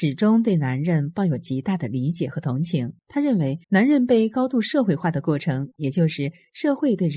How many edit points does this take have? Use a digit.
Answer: 2